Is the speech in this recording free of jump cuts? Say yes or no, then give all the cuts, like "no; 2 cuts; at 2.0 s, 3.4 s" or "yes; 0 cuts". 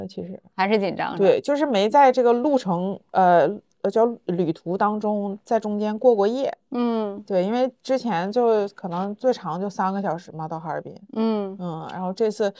yes; 0 cuts